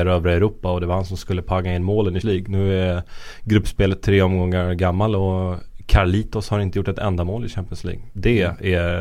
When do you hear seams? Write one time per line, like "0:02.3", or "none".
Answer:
0:02.2

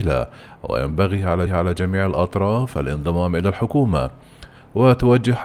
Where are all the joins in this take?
0:01.5

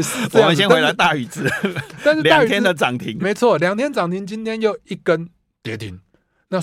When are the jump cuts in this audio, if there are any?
0:03.2

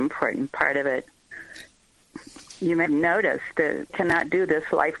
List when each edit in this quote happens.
0:02.9
0:03.9

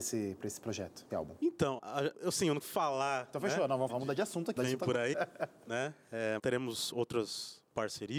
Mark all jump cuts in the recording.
0:01.1
0:01.8
0:02.1
0:02.6
0:03.9
0:04.6
0:05.1
0:06.4

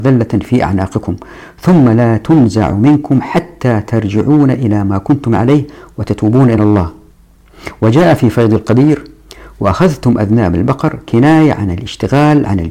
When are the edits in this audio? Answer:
none

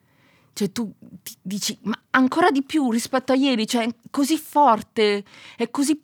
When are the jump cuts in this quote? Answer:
none

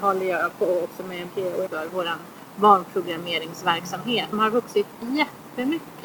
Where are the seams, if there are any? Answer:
0:01.3
0:01.7
0:04.3

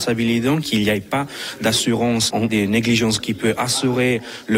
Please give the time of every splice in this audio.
0:02.5
0:03.2

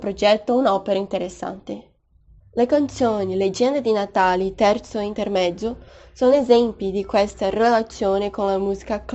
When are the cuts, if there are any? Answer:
none

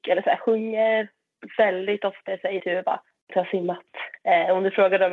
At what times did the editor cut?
0:02.3
0:02.6
0:03.3

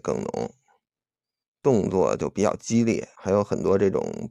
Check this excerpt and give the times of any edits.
0:03.2

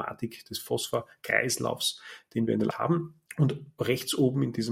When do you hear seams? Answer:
0:02.7
0:03.3

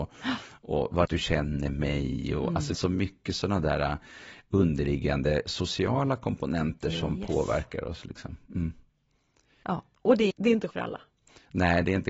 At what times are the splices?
0:01.0
0:02.7
0:10.3
0:10.7

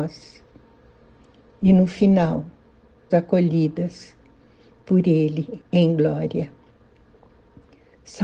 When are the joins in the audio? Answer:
0:03.1

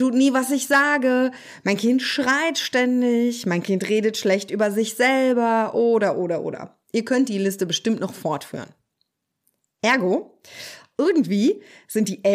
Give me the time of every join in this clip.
none

